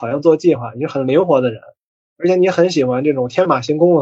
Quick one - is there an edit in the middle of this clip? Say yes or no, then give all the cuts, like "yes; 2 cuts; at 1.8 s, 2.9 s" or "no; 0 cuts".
no; 0 cuts